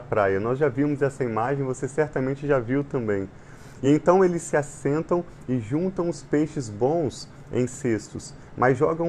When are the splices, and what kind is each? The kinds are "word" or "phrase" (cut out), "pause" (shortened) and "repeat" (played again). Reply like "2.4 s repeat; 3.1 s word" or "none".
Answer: none